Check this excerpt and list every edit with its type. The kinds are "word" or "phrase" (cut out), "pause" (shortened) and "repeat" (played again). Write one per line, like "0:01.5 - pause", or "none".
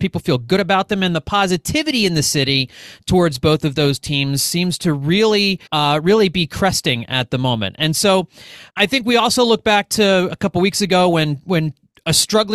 0:05.7 - pause
0:08.7 - pause